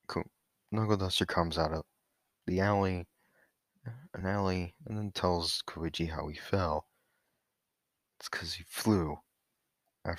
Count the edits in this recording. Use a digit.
0